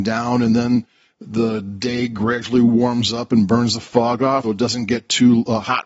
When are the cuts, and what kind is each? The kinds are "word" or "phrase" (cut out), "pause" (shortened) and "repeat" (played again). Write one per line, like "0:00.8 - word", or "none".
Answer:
0:04.4 - word